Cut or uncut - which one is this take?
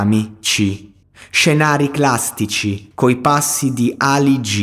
cut